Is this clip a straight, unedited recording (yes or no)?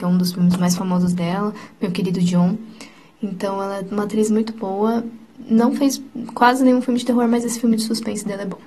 yes